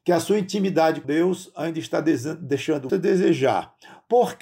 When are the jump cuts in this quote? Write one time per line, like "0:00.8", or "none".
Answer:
0:01.0
0:02.9